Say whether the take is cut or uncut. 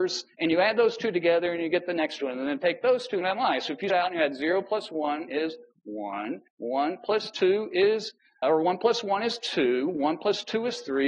cut